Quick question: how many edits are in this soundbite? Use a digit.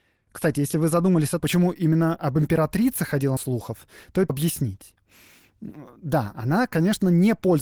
3